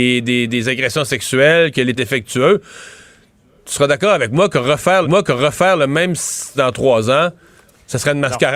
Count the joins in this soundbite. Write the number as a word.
three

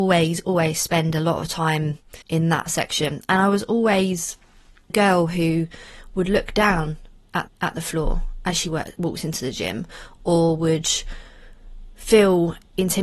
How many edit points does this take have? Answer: three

